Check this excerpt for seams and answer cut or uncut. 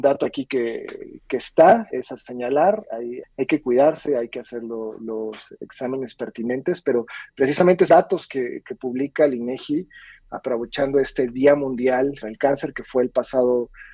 cut